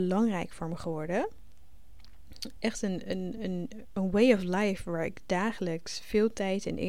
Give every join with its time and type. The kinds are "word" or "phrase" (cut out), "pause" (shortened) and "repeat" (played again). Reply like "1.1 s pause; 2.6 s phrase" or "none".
none